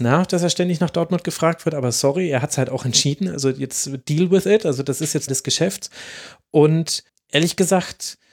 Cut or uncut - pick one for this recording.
cut